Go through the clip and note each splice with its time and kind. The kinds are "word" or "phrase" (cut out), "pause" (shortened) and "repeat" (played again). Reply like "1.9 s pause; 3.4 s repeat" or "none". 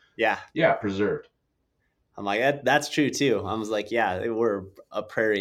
none